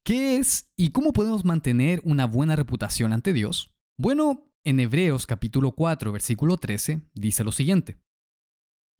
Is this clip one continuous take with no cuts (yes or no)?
no